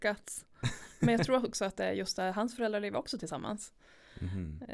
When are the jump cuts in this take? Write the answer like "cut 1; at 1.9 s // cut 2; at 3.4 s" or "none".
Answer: none